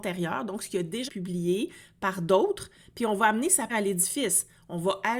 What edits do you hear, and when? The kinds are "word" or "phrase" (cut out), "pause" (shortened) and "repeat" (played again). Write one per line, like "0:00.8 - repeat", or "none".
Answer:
0:01.1 - word
0:03.7 - word